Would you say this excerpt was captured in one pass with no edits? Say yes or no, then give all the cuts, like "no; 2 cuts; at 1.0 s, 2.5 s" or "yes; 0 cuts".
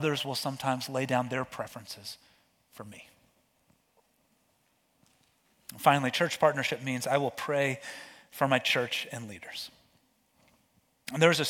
yes; 0 cuts